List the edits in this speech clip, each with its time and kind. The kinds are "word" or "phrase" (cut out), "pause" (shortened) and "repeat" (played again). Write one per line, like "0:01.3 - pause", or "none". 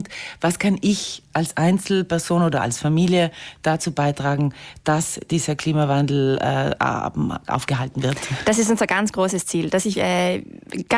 0:09.9 - word

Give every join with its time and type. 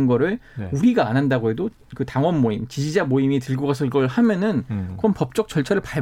none

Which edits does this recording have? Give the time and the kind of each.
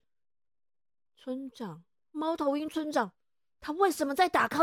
none

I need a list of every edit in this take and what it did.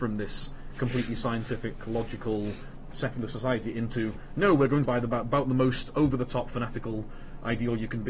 0:02.9 - word
0:04.8 - word

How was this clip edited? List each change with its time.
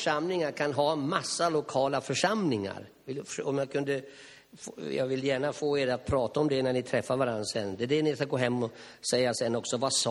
none

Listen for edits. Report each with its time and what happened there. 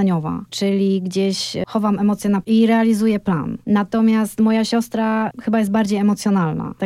0:02.4 - word

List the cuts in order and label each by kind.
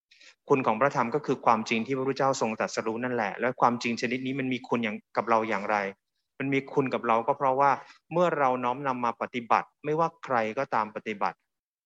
none

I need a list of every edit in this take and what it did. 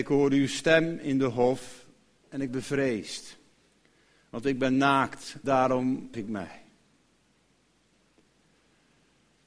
0:02.5 - word
0:05.4 - word
0:06.1 - word

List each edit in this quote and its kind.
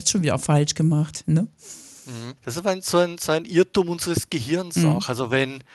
0:02.4 - pause

